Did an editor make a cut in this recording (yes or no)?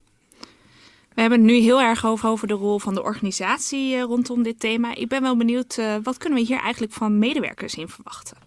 yes